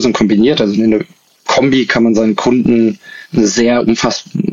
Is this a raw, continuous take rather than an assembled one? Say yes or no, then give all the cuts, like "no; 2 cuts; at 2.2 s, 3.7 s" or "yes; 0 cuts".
yes; 0 cuts